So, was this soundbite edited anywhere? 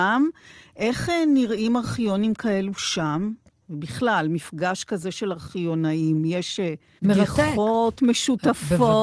no; 0 cuts

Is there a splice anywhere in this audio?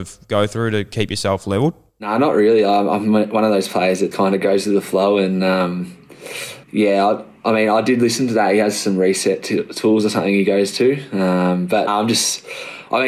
yes; 3 cuts; at 4.1 s, 6.6 s, 11.9 s

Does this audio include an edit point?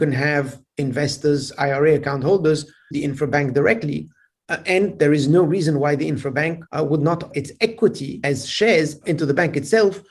yes; 4 cuts; at 2.9 s, 6.7 s, 7.3 s, 8.2 s

